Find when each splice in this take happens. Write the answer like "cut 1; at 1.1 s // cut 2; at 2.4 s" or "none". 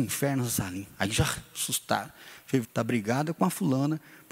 cut 1; at 2.6 s